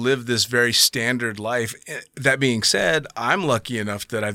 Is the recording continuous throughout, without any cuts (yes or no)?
yes